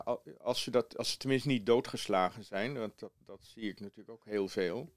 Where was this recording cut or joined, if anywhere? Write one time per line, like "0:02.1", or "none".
none